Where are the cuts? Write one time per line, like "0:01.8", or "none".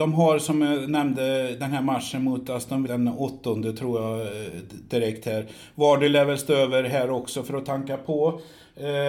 0:02.9